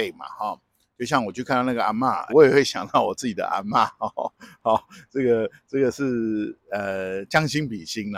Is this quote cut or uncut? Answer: cut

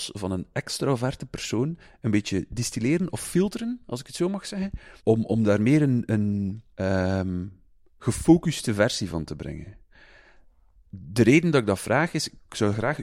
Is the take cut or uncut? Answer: cut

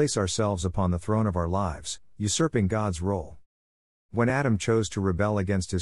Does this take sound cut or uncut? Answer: uncut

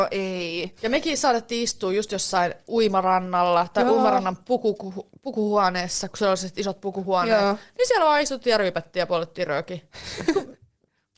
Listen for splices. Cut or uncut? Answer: uncut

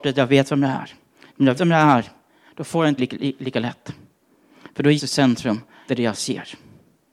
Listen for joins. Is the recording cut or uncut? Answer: cut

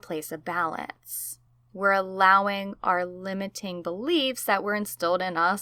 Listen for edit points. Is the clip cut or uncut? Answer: uncut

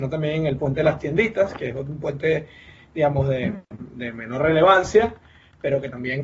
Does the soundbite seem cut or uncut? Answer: uncut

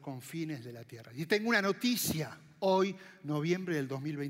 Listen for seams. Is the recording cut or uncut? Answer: uncut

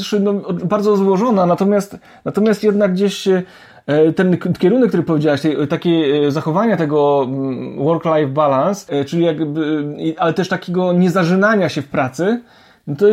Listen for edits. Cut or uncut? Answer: uncut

